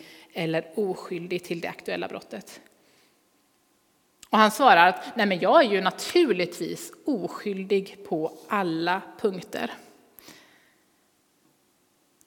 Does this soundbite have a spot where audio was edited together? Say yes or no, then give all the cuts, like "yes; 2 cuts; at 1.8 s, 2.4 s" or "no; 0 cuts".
no; 0 cuts